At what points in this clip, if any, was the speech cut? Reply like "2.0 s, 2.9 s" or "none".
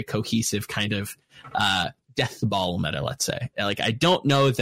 none

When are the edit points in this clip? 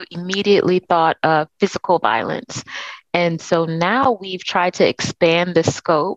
none

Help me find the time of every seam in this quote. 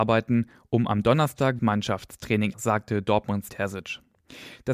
1.6 s, 2.5 s, 3.5 s

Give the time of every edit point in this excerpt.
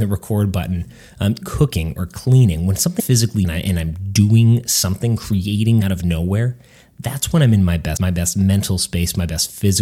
1.4 s, 3.0 s, 3.4 s, 5.8 s, 8.0 s

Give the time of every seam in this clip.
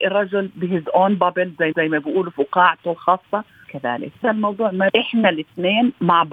1.7 s, 3.6 s, 4.2 s, 4.9 s

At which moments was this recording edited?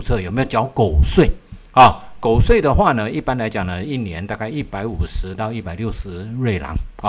none

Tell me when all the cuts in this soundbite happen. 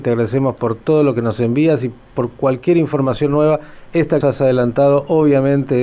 4.2 s

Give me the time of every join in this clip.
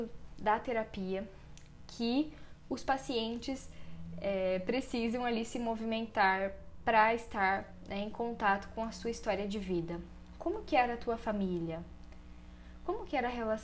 none

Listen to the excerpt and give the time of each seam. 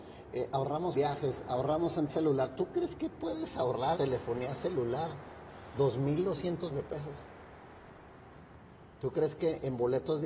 0.9 s, 2.1 s, 4.0 s, 6.7 s

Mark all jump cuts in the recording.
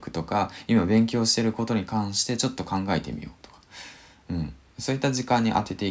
none

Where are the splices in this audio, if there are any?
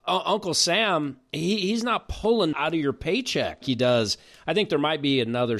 2.5 s, 3.6 s

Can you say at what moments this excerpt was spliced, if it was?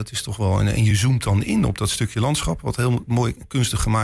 none

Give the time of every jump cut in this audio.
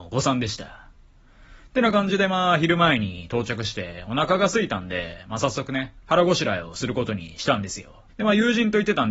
8.1 s

